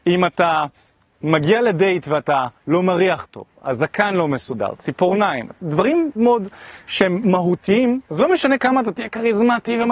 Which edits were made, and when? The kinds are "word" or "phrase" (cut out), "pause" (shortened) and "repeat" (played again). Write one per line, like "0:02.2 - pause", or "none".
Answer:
0:06.2 - word
0:08.1 - pause